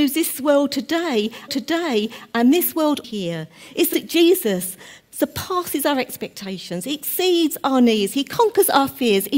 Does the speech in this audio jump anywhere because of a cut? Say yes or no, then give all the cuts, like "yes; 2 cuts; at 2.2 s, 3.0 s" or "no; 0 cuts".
yes; 3 cuts; at 1.5 s, 3.0 s, 3.9 s